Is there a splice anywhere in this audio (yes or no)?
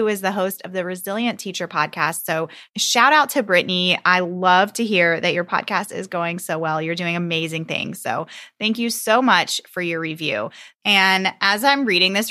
no